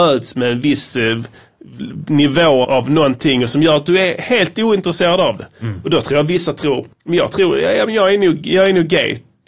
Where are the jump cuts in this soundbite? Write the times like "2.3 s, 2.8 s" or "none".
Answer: 2.6 s, 6.9 s